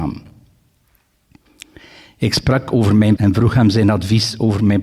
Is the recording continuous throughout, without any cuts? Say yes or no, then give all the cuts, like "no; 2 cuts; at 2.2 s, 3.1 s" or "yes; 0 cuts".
no; 1 cut; at 3.2 s